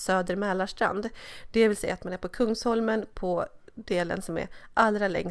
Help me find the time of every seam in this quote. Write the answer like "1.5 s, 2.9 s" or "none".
none

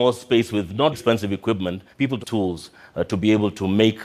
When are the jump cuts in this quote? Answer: 0.9 s, 1.9 s, 2.2 s

